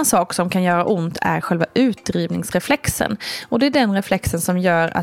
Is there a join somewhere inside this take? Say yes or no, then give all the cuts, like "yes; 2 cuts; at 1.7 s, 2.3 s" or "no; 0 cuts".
no; 0 cuts